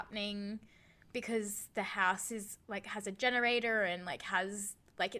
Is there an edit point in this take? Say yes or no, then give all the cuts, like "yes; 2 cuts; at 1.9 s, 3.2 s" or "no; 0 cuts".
no; 0 cuts